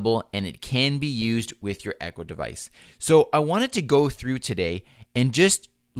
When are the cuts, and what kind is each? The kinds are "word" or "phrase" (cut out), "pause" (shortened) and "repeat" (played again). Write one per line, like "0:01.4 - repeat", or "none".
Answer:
none